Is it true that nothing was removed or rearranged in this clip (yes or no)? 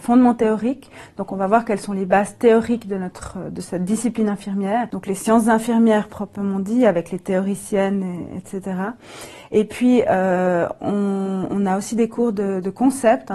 yes